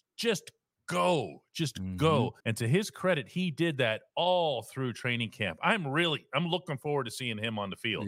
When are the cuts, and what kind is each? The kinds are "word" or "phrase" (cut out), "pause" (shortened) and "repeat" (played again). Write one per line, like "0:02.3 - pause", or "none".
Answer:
0:02.4 - pause

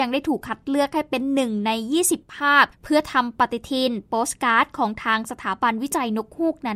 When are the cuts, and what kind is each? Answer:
0:02.7 - pause

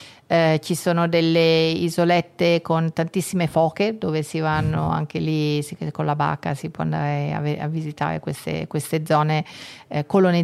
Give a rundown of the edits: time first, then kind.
none

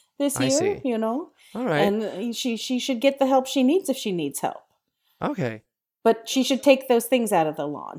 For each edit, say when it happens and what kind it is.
none

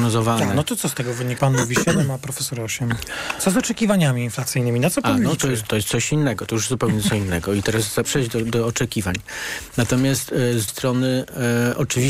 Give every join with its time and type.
0:01.4 - word
0:05.7 - word
0:08.0 - word
0:10.7 - word

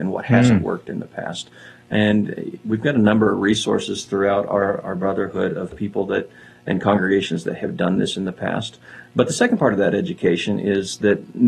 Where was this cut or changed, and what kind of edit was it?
none

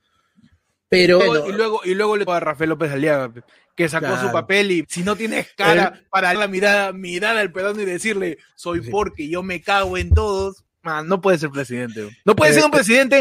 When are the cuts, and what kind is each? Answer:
0:01.2 - word
0:02.3 - word
0:04.8 - word
0:06.3 - word
0:07.5 - word

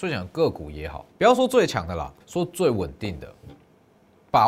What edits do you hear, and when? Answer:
0:01.1 - pause
0:02.2 - pause

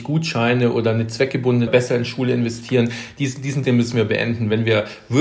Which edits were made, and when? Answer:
0:01.7 - phrase
0:03.6 - word

